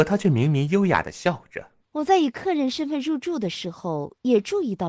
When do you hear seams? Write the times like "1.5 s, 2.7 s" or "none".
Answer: 1.8 s